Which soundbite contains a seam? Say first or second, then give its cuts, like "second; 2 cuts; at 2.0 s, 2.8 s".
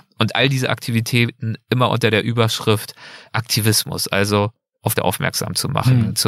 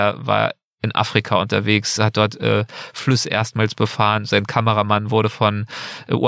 first; 2 cuts; at 3.3 s, 4.9 s